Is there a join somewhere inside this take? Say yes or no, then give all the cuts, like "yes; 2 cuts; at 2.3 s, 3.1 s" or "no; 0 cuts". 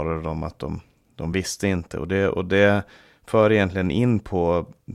no; 0 cuts